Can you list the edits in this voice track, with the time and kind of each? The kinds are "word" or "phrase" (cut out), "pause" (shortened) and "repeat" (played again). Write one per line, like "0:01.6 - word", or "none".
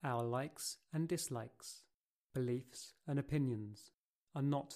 none